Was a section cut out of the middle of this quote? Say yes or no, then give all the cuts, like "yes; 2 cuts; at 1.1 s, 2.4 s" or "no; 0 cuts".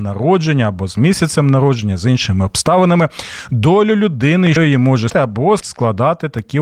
yes; 3 cuts; at 4.6 s, 5.1 s, 5.6 s